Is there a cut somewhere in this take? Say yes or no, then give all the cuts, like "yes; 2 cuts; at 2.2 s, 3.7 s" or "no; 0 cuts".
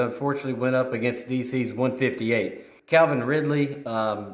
yes; 1 cut; at 2.8 s